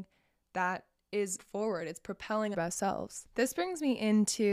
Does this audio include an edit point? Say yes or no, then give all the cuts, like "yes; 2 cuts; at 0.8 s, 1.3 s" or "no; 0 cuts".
yes; 2 cuts; at 1.4 s, 2.5 s